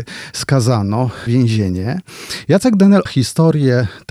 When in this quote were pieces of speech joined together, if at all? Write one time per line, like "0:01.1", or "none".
0:01.3
0:03.1